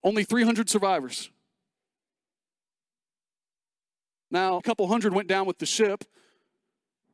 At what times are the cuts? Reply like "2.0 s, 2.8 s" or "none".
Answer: 4.6 s